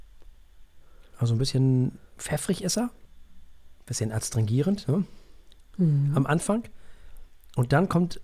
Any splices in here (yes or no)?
yes